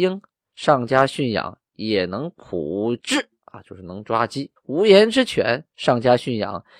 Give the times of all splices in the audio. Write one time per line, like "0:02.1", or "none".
0:04.6